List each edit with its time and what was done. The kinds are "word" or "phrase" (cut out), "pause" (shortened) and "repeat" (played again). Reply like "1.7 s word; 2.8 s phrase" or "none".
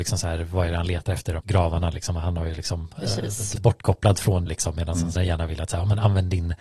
1.4 s word; 3.6 s phrase; 4.5 s word; 5.2 s word